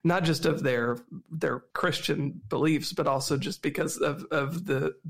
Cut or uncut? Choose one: cut